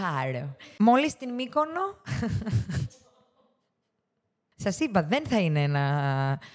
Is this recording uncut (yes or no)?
yes